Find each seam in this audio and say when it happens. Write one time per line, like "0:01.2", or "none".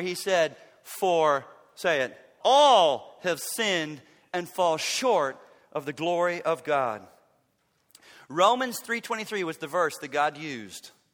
0:02.4